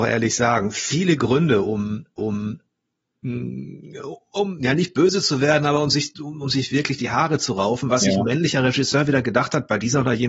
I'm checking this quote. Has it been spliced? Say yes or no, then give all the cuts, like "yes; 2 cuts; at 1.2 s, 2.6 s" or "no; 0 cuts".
yes; 1 cut; at 2.2 s